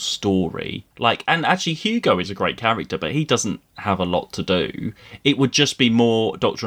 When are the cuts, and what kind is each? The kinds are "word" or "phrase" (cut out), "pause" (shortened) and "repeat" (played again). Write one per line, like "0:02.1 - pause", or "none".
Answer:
0:00.9 - pause